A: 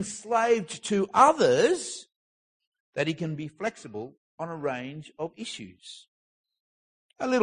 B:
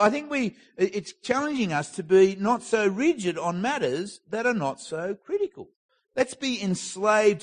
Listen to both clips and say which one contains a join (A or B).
B